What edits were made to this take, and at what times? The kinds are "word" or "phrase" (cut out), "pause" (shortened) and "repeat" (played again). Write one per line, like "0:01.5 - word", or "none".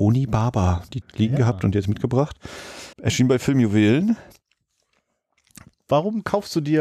0:01.0 - word
0:02.9 - pause